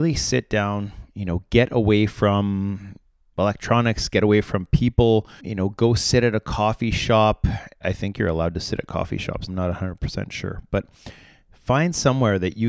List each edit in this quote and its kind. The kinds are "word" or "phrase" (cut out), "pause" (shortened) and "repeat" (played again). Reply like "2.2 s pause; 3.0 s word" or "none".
5.4 s word; 7.8 s word; 9.5 s word